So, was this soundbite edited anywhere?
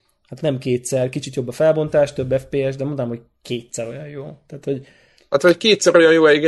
no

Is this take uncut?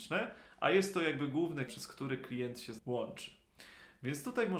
no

